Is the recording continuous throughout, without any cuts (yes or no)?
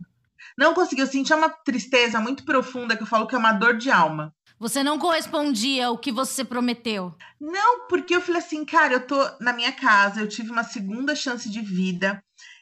yes